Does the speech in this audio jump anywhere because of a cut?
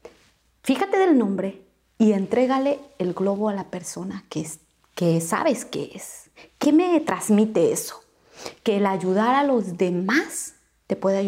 yes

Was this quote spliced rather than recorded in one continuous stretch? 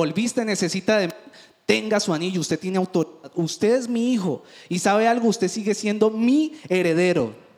no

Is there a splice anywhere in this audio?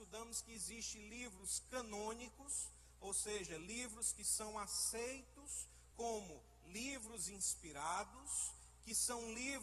no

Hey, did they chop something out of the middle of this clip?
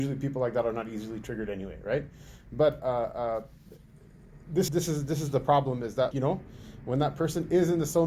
yes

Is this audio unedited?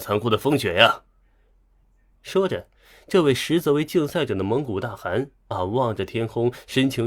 yes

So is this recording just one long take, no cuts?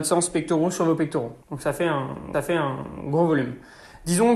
no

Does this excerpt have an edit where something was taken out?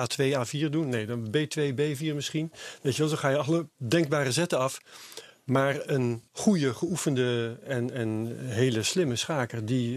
yes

